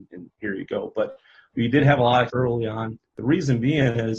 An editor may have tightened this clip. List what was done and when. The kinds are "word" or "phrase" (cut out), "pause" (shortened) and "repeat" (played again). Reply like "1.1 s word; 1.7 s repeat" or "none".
2.3 s word

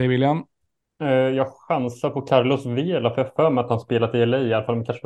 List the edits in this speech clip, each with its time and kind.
none

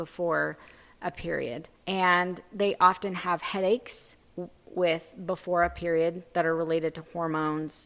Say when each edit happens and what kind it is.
1.8 s pause; 4.2 s pause

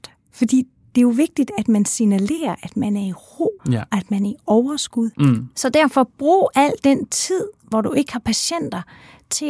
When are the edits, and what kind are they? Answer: 3.6 s pause; 5.1 s pause

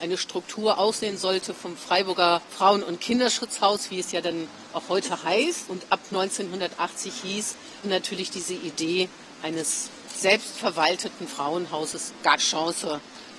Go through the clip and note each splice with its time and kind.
7.8 s word; 12.4 s word

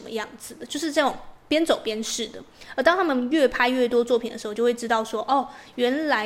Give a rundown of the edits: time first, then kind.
none

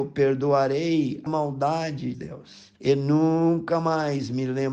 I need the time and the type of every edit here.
1.3 s word; 2.1 s word; 2.8 s pause

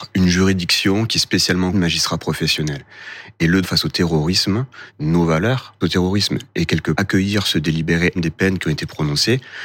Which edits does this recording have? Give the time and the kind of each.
1.7 s word; 3.6 s word; 4.9 s word; 5.8 s word; 6.9 s word; 8.2 s word

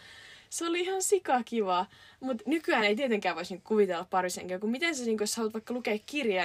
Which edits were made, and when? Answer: none

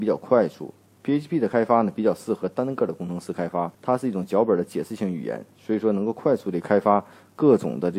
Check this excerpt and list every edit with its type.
3.7 s pause

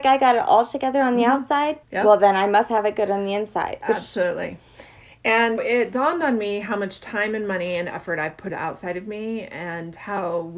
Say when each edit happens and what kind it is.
1.8 s pause; 5.6 s word; 8.5 s word

